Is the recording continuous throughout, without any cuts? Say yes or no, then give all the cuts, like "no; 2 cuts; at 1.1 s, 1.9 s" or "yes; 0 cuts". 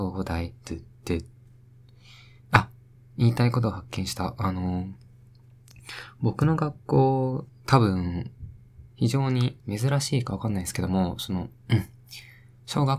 no; 5 cuts; at 2.9 s, 7.5 s, 8.9 s, 9.6 s, 11.6 s